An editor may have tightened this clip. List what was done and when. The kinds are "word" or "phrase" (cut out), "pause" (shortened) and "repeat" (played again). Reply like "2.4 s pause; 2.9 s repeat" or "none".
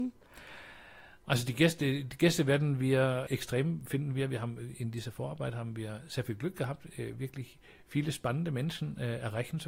none